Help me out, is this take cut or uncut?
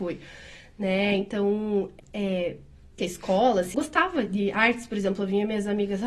cut